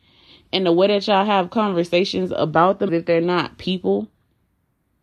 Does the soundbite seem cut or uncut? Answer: cut